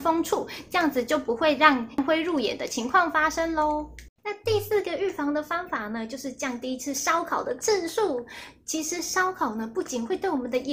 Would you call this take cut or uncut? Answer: cut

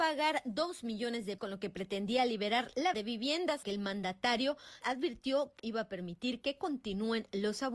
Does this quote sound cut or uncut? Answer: cut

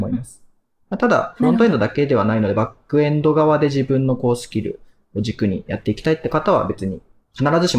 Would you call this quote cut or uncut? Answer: uncut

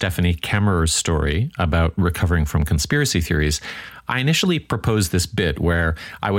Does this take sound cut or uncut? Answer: uncut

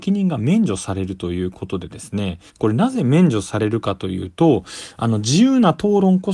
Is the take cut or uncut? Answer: cut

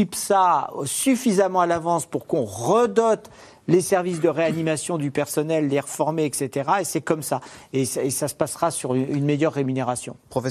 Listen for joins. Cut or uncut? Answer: uncut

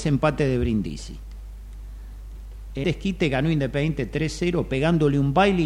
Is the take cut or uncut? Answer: cut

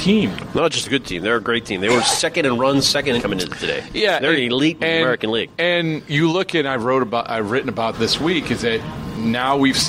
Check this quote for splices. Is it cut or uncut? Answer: cut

